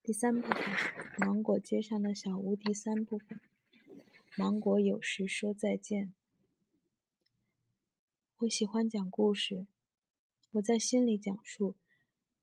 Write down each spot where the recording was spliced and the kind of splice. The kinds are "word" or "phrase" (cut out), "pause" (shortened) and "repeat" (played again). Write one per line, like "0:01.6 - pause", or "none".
none